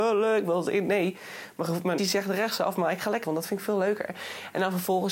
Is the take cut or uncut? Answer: cut